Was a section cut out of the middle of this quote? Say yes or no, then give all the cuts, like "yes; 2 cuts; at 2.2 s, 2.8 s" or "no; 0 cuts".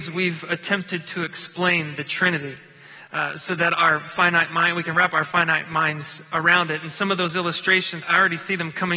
yes; 1 cut; at 8.0 s